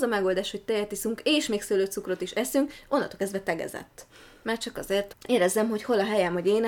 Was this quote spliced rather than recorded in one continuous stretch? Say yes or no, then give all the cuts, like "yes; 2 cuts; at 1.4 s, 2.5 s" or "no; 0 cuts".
yes; 1 cut; at 5.1 s